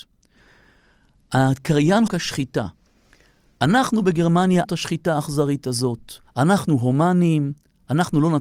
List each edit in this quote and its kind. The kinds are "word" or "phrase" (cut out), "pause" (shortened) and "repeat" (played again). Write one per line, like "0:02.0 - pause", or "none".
0:02.1 - phrase
0:04.6 - word
0:06.3 - pause